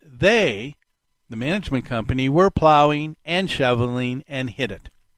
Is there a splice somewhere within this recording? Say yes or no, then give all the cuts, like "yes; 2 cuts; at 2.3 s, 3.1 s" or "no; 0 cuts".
no; 0 cuts